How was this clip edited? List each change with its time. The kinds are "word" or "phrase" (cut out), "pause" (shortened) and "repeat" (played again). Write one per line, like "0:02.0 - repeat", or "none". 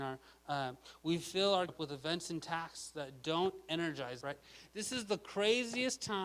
0:01.7 - word
0:04.2 - word